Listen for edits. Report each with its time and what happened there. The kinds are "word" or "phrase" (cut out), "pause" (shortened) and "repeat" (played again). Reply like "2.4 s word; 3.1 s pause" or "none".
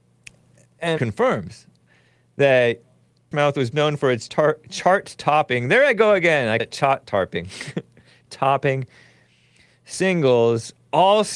1.0 s word; 3.3 s word; 3.7 s word; 4.3 s word; 6.6 s word; 8.3 s word